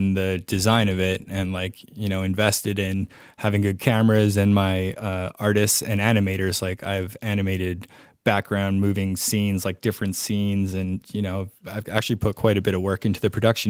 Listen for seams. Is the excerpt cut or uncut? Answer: uncut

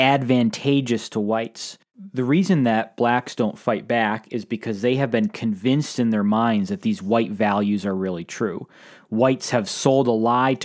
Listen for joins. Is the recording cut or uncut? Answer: uncut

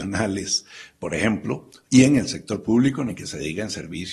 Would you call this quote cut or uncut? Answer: uncut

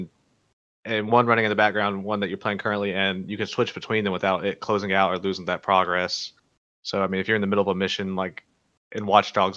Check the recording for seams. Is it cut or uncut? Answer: uncut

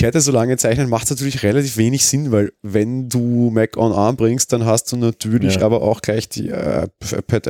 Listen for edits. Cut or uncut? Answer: uncut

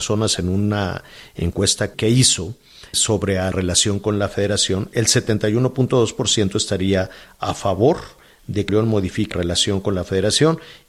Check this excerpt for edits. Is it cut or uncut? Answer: cut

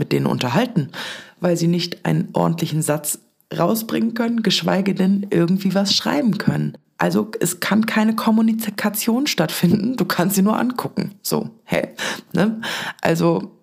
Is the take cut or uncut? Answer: uncut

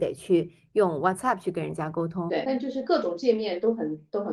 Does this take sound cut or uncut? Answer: uncut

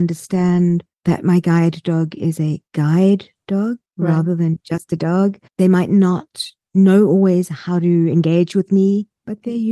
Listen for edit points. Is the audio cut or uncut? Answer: cut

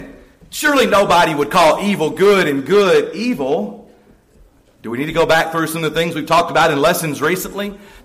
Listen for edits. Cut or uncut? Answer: uncut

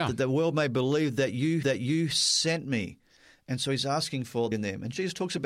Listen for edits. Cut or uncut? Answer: cut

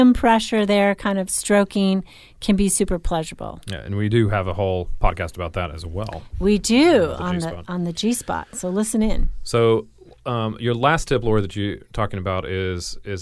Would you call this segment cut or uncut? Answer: uncut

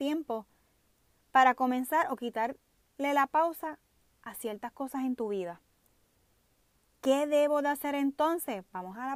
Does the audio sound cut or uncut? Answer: uncut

